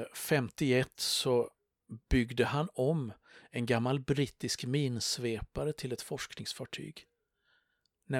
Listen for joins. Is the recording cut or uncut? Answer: uncut